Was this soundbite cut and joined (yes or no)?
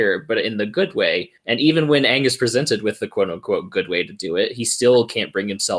yes